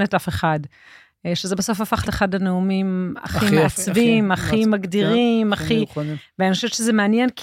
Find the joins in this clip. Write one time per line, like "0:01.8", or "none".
0:02.0